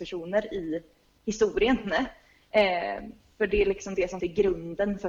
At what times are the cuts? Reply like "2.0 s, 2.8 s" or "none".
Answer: 4.2 s